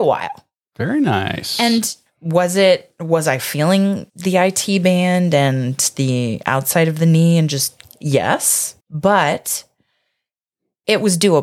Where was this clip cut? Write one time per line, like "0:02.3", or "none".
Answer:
0:04.1
0:08.8